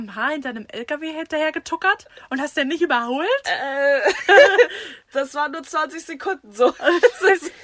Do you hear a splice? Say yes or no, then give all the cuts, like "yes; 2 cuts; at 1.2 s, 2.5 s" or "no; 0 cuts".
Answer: no; 0 cuts